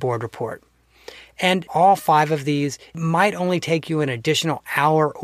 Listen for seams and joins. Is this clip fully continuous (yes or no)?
yes